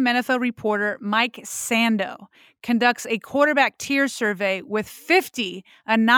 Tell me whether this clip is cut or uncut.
uncut